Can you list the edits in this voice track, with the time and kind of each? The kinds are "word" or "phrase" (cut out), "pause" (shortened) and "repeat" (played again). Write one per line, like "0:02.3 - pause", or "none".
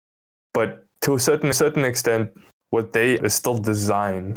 0:01.5 - repeat
0:03.2 - word